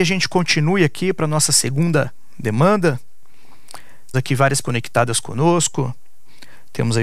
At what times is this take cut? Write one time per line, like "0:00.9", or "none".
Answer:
0:04.1
0:04.6

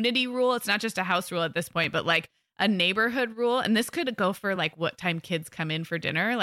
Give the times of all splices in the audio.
none

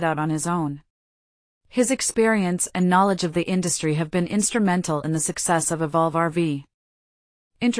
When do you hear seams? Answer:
none

